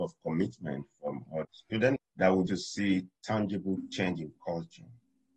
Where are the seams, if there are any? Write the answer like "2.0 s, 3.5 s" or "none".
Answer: 1.4 s, 2.0 s, 2.5 s